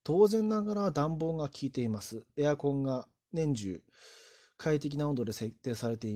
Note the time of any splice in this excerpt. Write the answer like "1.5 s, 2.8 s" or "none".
none